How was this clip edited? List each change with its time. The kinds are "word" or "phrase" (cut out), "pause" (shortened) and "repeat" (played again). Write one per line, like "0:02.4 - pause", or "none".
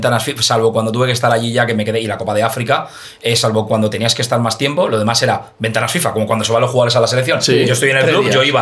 none